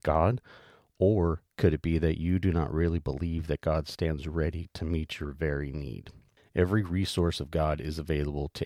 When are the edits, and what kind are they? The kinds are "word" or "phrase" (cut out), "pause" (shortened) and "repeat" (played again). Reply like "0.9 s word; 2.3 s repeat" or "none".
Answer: none